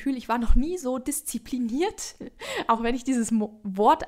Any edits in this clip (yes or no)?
no